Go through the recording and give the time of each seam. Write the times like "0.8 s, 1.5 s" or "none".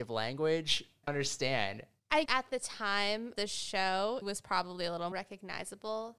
1.1 s, 2.3 s, 3.3 s, 4.2 s, 5.1 s